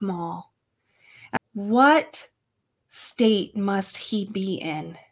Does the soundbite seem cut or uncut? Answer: cut